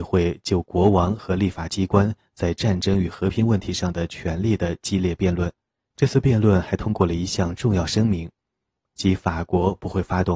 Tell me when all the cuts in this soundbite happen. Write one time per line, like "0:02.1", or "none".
0:05.7